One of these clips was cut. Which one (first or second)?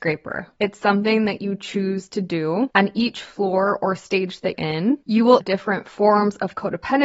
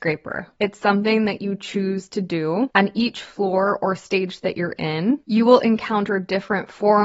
first